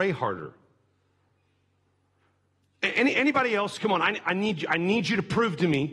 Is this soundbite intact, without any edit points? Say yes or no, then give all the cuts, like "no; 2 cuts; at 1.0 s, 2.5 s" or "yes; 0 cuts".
no; 1 cut; at 4.2 s